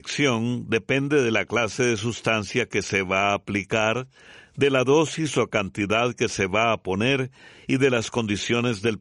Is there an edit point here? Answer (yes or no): no